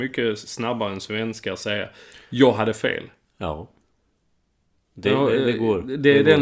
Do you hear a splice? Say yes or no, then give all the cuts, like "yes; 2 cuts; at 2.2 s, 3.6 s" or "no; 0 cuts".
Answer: no; 0 cuts